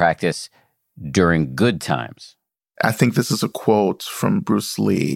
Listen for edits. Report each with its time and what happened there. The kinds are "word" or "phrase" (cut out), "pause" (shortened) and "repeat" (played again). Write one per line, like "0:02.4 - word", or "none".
none